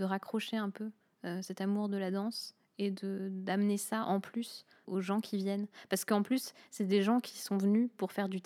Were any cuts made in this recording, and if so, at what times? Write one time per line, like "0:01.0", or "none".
0:04.8